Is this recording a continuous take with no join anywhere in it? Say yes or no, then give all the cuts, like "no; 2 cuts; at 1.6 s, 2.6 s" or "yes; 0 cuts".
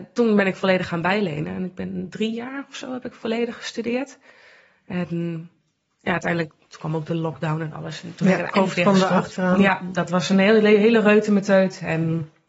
yes; 0 cuts